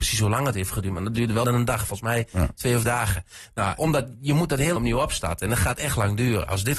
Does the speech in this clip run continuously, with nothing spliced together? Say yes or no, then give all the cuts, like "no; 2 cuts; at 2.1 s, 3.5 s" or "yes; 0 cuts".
no; 4 cuts; at 1.4 s, 2.8 s, 3.8 s, 4.8 s